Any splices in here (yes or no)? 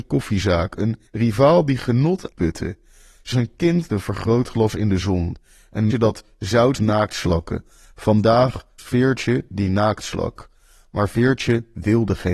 yes